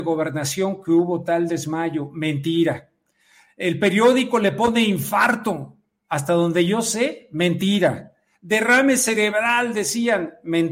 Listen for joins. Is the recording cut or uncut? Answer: uncut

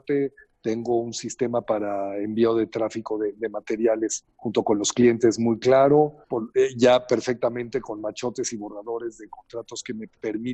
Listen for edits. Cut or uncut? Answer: cut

